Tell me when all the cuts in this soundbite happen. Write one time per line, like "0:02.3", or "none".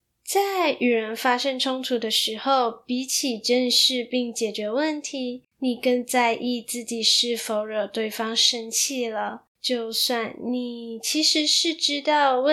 0:05.5
0:09.5